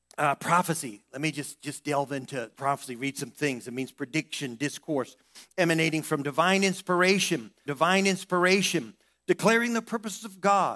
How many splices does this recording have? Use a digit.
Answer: 2